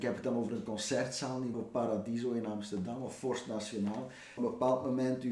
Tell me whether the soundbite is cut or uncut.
cut